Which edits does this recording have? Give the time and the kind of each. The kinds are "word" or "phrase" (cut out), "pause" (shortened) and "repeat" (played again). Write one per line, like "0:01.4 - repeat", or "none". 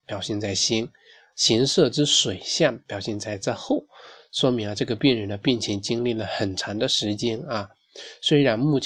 none